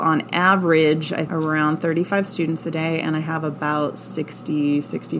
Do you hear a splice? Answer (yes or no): yes